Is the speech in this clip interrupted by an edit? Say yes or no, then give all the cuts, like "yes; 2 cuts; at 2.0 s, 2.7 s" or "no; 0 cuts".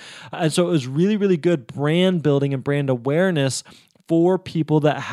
no; 0 cuts